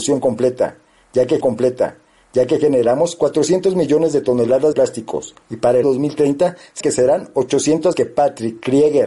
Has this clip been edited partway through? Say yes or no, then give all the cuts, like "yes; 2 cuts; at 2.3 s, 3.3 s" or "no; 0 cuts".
yes; 6 cuts; at 1.4 s, 4.7 s, 5.4 s, 5.8 s, 6.8 s, 7.9 s